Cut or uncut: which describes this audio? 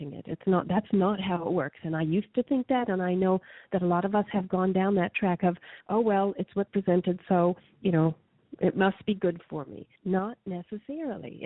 cut